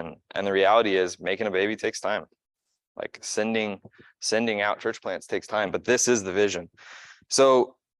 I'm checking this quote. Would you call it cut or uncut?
uncut